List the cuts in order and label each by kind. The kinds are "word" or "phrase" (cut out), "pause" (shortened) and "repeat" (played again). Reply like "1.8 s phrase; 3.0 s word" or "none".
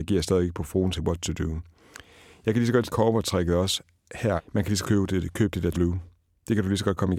1.0 s word; 2.8 s word; 4.4 s word; 4.8 s word; 5.7 s word